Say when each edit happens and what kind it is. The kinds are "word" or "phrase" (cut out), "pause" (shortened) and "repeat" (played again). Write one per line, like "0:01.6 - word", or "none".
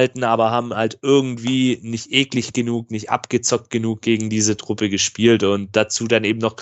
none

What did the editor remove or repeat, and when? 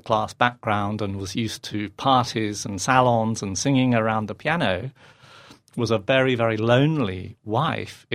none

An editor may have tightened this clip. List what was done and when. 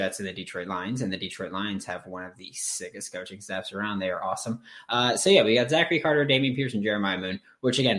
none

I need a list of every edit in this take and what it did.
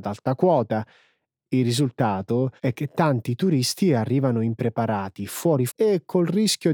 0:02.6 - pause
0:05.7 - word

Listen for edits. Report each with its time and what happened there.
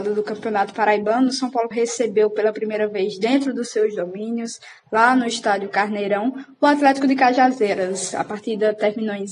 0:01.7 - word

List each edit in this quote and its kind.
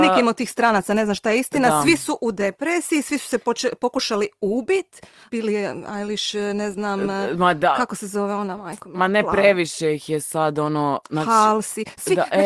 0:05.3 - word

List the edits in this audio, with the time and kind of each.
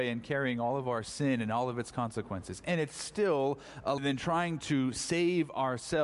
0:04.0 - phrase

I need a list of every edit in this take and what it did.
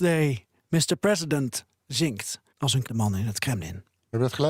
0:02.5 - pause
0:02.8 - phrase

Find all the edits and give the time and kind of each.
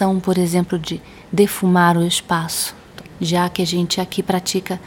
none

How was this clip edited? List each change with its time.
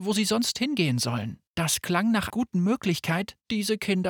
0:01.5 - pause
0:02.3 - word

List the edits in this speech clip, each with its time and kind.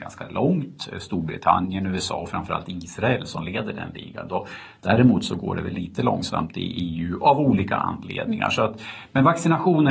none

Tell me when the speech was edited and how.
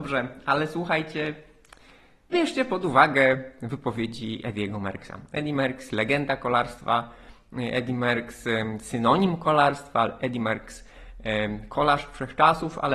0:02.3 - word

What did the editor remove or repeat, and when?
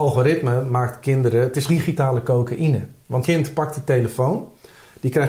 0:01.7 - word
0:03.2 - word

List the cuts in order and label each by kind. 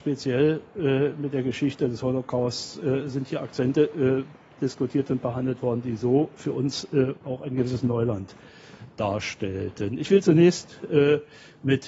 none

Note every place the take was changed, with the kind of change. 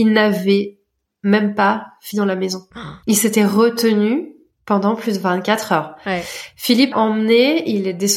0:02.1 - word
0:06.9 - word

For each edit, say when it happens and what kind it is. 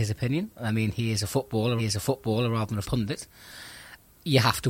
0:01.8 - repeat
0:02.8 - word

